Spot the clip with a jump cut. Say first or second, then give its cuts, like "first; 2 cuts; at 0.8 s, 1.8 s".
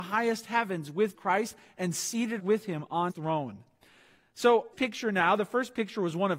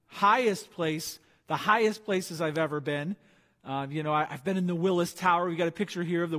first; 4 cuts; at 1.1 s, 2.4 s, 3.1 s, 4.7 s